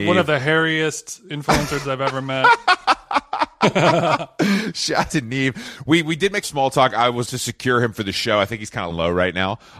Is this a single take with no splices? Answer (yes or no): no